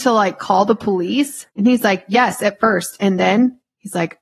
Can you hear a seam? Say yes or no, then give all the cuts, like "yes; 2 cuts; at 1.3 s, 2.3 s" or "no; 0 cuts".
yes; 1 cut; at 1.5 s